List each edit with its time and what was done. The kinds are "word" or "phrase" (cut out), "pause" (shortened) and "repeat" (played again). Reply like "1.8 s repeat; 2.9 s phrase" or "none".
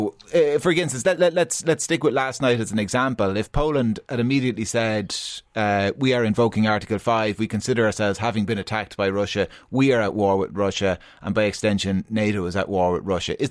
none

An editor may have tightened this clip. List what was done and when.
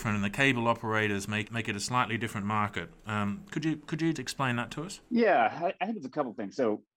1.4 s word; 4.1 s word; 5.1 s pause

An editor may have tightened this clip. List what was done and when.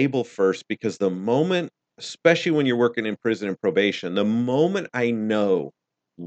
1.8 s pause

